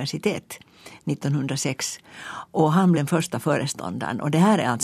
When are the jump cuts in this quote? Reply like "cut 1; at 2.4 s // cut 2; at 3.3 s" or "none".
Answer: cut 1; at 2.9 s